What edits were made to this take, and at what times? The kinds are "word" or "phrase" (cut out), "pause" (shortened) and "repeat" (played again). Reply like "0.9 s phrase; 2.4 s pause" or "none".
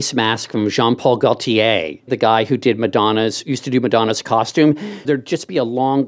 5.0 s word